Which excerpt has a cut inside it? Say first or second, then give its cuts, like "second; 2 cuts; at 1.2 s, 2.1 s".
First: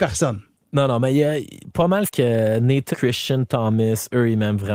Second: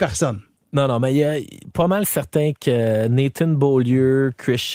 first; 2 cuts; at 2.1 s, 2.9 s